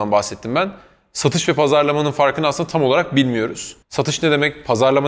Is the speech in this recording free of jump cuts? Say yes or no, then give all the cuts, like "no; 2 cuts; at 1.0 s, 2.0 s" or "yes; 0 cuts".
no; 1 cut; at 3.8 s